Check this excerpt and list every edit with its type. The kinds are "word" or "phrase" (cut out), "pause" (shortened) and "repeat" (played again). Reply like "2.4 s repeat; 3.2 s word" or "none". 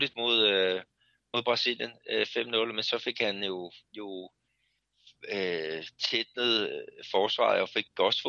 3.8 s pause